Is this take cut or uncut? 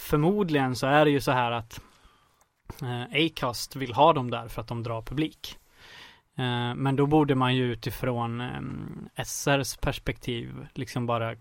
uncut